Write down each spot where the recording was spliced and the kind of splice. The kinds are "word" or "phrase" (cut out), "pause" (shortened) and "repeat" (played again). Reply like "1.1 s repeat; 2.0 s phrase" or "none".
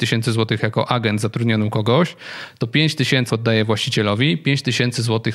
3.3 s word